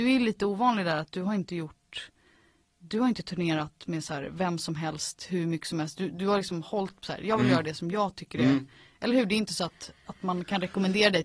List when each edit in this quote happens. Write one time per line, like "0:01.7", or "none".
none